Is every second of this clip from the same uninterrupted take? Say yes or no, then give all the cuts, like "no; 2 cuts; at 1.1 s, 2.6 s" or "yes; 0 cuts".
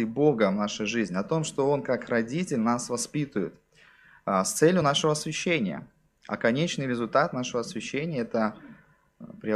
yes; 0 cuts